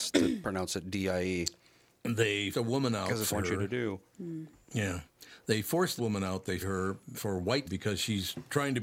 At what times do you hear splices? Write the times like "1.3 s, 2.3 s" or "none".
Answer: 2.5 s, 3.3 s, 6.0 s, 6.6 s, 7.2 s, 7.7 s